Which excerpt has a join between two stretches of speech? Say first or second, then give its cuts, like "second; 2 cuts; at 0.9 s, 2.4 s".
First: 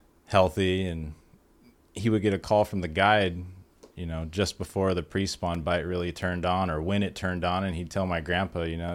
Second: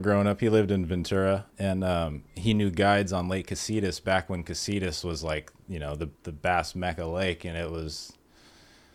second; 3 cuts; at 1.5 s, 2.3 s, 6.1 s